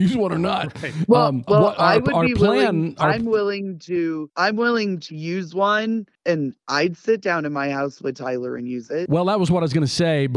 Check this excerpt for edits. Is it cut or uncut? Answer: cut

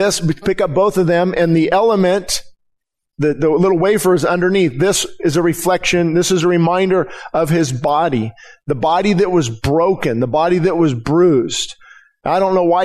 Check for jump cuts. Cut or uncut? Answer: uncut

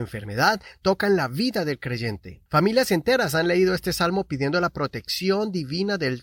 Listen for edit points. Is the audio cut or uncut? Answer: cut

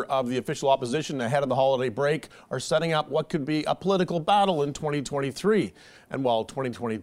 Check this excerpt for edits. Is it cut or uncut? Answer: uncut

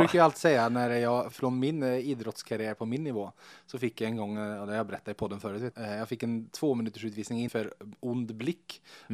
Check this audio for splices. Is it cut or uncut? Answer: cut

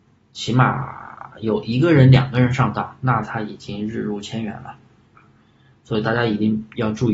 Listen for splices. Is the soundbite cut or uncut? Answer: uncut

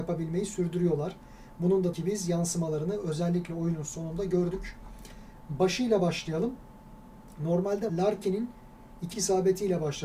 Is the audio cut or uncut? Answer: cut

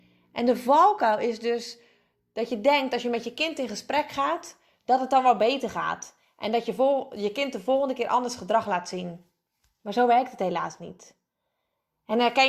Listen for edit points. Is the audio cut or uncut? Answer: uncut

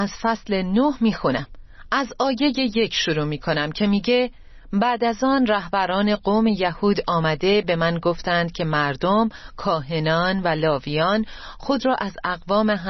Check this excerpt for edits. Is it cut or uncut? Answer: uncut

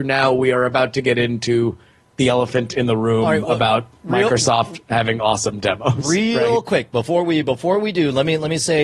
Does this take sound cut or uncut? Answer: uncut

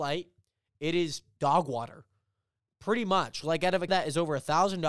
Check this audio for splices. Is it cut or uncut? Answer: cut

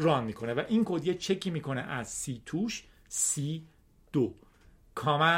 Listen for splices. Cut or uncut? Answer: uncut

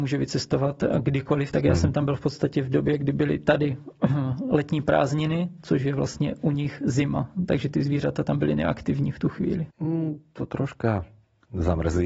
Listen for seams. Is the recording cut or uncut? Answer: cut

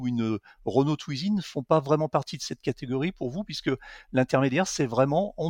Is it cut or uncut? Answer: uncut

